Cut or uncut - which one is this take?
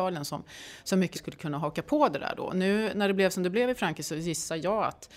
cut